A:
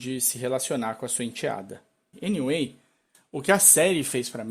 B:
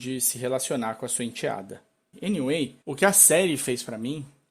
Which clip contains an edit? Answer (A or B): B